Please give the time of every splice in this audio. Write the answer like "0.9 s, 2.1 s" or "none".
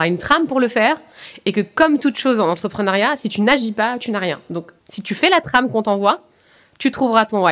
4.8 s